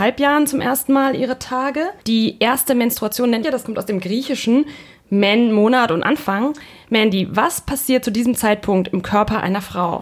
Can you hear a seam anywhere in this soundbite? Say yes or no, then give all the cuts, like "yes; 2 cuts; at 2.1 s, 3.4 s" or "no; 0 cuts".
yes; 3 cuts; at 2.0 s, 3.4 s, 6.0 s